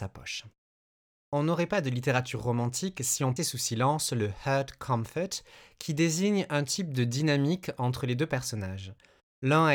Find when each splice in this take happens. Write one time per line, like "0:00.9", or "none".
0:03.4